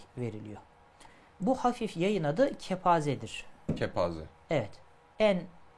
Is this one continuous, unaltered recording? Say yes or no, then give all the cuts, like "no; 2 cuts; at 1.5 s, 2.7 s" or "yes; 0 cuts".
yes; 0 cuts